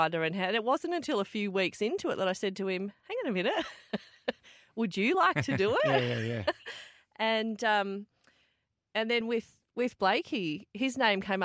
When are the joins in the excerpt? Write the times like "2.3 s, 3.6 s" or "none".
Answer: none